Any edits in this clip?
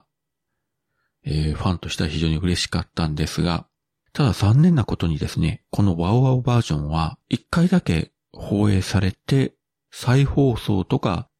yes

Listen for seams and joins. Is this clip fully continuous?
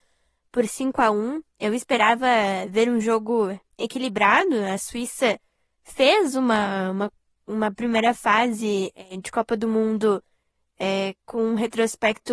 yes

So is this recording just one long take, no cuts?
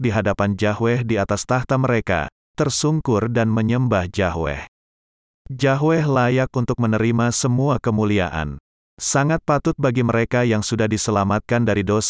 yes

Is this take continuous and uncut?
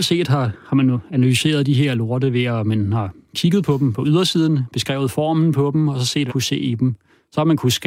no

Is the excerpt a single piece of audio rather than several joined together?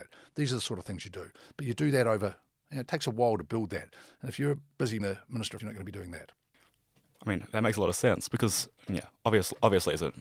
no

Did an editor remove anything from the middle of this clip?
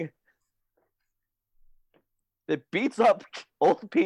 no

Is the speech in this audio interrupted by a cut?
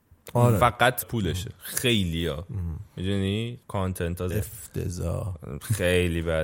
yes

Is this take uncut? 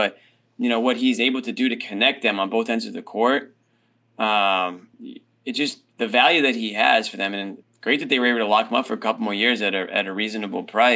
no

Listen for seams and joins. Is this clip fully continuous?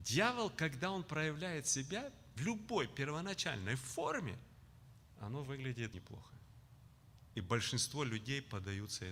no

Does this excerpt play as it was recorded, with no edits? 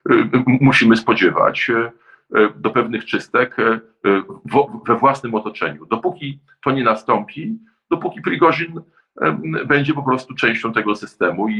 yes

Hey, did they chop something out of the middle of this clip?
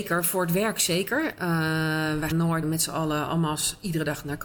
yes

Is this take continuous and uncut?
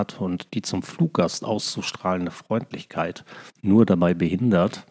no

